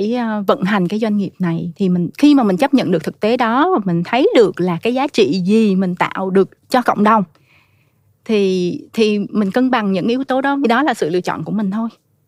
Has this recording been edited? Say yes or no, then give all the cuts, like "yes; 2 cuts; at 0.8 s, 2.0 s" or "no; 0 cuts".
no; 0 cuts